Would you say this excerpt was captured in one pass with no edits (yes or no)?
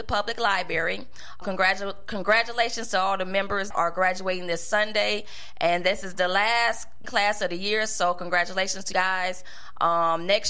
no